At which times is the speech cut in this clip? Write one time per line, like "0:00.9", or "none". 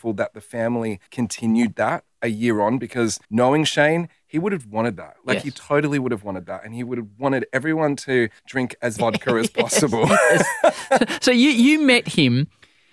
0:01.1
0:03.2
0:08.4
0:09.0